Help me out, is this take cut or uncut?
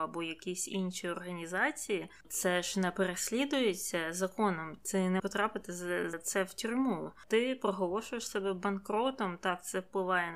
cut